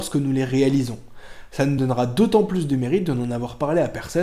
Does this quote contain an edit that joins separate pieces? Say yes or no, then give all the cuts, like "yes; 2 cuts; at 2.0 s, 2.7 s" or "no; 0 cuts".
no; 0 cuts